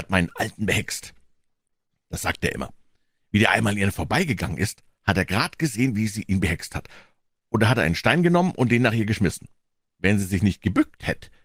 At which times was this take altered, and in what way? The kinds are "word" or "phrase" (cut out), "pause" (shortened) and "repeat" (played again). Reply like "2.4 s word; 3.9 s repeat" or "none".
none